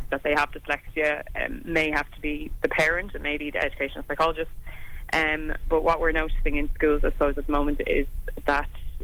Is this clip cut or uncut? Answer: cut